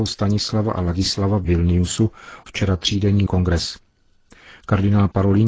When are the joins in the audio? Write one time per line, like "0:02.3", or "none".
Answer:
0:01.4
0:02.5
0:03.3